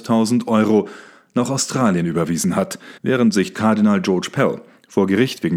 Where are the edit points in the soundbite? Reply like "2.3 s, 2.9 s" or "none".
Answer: 3.0 s, 3.5 s